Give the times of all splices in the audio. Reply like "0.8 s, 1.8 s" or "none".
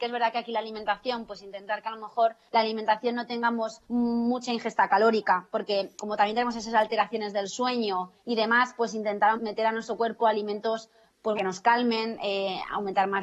2.5 s, 3.8 s, 6.0 s, 8.2 s, 9.4 s, 11.4 s